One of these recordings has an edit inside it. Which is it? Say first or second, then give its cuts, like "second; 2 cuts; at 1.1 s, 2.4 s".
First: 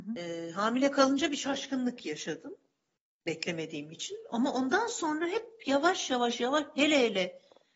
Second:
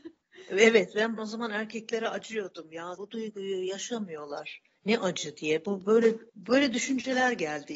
second; 3 cuts; at 1.2 s, 3.0 s, 6.3 s